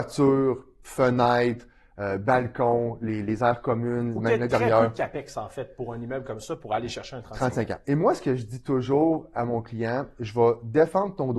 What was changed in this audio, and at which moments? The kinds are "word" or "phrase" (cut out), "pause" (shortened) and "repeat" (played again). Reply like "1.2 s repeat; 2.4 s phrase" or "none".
none